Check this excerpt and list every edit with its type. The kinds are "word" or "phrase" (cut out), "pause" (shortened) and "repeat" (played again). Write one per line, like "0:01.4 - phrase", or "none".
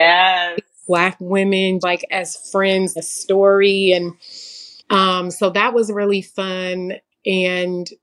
0:01.8 - word
0:03.0 - word
0:04.8 - pause